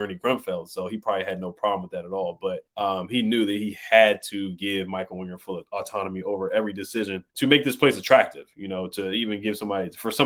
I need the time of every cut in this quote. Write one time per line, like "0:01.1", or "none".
0:02.7
0:07.3